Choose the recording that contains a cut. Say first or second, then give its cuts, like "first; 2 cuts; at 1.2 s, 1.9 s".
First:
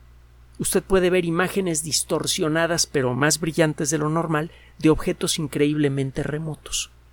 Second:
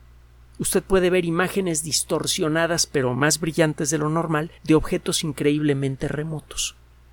second; 1 cut; at 4.6 s